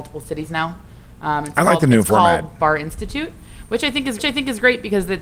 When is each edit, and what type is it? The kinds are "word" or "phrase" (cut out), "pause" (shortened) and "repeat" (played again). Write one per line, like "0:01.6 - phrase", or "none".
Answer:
0:04.2 - repeat

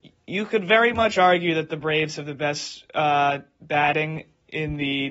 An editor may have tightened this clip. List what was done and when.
none

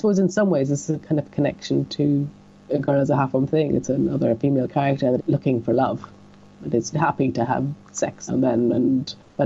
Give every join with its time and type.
0:05.2 - word
0:06.9 - word
0:08.3 - word

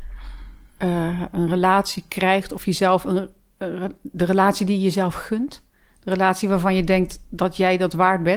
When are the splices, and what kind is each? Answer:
none

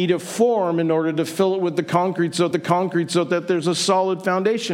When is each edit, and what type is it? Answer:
0:02.5 - repeat

